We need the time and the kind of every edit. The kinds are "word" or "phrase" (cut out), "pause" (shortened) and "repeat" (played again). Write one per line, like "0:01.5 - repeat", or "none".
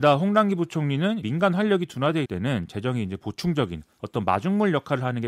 0:01.2 - word
0:02.3 - word